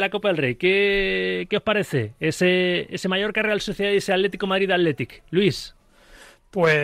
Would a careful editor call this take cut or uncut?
uncut